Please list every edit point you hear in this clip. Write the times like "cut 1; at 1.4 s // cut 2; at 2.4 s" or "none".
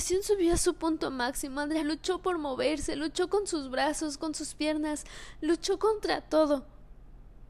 cut 1; at 1.8 s